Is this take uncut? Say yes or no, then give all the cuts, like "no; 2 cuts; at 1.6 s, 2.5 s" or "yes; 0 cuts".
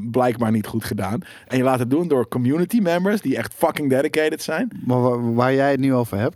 yes; 0 cuts